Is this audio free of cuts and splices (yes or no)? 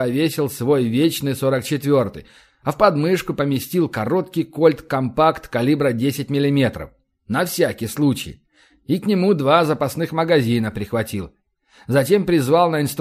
yes